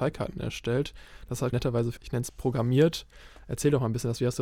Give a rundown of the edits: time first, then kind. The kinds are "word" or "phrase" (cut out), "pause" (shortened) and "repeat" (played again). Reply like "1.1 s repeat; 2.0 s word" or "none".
1.5 s word; 2.0 s word; 2.3 s word